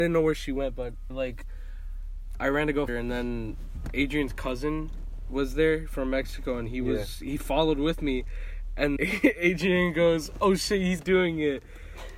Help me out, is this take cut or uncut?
cut